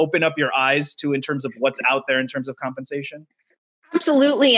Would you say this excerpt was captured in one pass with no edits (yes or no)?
yes